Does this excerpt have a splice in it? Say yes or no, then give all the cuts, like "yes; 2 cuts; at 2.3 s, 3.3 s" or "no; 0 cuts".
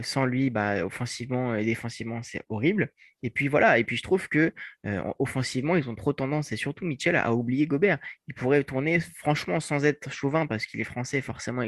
no; 0 cuts